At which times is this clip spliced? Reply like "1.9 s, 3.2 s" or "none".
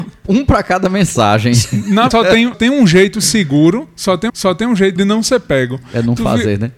2.1 s, 2.5 s, 4.3 s, 5.0 s